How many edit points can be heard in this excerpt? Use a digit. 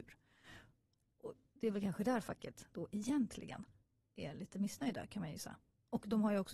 0